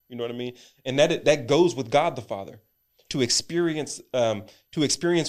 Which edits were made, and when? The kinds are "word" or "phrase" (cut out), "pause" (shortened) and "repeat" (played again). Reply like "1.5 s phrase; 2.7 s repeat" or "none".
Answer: none

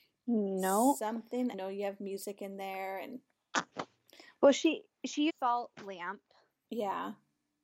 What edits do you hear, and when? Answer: 1.5 s phrase; 5.3 s phrase

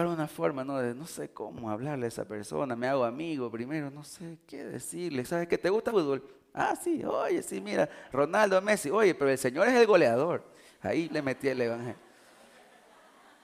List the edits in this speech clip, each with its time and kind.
5.9 s word; 11.1 s word

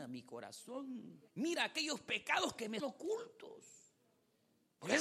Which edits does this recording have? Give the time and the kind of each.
1.3 s pause; 2.8 s word

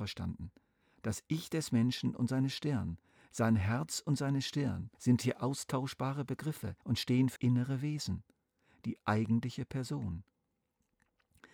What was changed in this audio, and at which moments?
4.9 s pause; 6.8 s pause; 7.4 s word

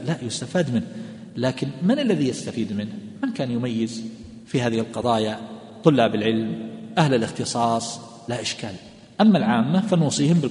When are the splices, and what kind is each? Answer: none

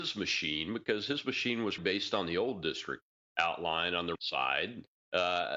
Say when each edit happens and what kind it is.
1.8 s word; 4.1 s word

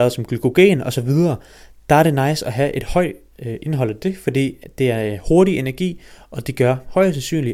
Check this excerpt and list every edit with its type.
none

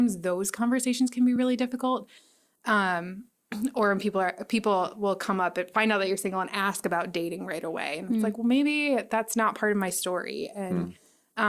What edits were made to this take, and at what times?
none

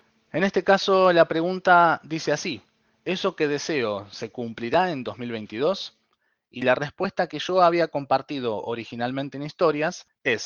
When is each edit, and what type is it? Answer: none

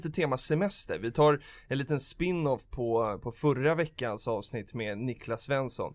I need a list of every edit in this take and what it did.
none

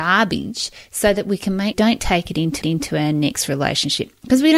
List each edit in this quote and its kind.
1.7 s phrase; 2.6 s repeat

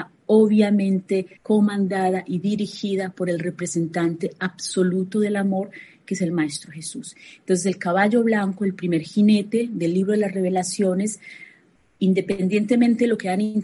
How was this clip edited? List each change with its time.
1.4 s pause

